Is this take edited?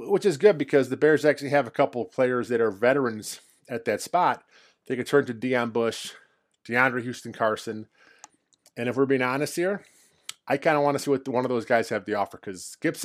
no; 0 cuts

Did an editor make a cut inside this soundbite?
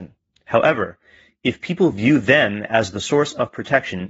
no; 0 cuts

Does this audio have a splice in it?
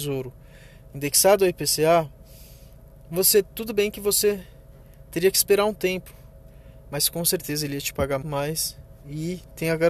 yes; 1 cut; at 8.2 s

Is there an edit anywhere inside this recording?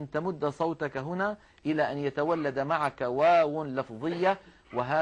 no; 0 cuts

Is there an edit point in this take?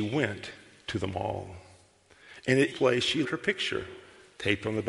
yes; 2 cuts; at 2.7 s, 3.2 s

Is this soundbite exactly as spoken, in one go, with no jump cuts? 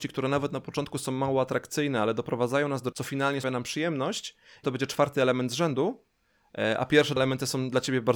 no; 4 cuts; at 2.9 s, 3.4 s, 4.6 s, 7.2 s

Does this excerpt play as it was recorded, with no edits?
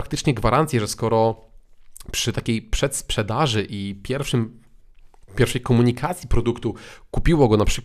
yes; 0 cuts

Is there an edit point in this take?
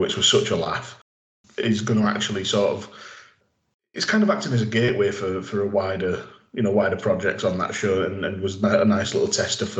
no; 0 cuts

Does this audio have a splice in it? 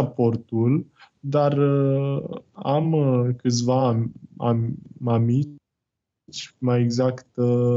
no; 0 cuts

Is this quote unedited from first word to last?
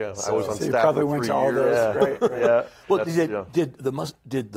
yes; 0 cuts

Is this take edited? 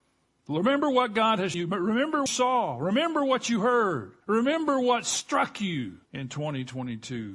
yes; 4 cuts; at 1.5 s, 2.3 s, 4.2 s, 6.0 s

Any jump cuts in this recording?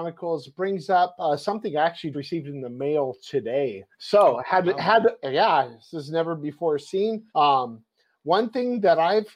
yes; 3 cuts; at 2.1 s, 3.9 s, 7.3 s

